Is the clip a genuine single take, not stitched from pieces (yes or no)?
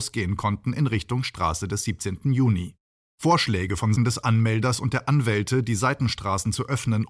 no